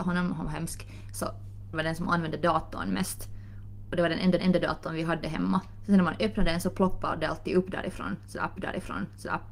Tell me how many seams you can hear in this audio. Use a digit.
3